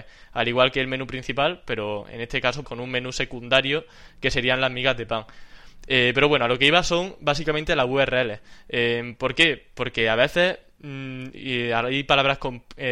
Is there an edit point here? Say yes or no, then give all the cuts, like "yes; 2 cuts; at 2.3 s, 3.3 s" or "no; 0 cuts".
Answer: yes; 1 cut; at 2.6 s